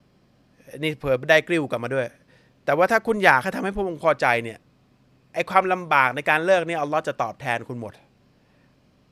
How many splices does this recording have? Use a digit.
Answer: 0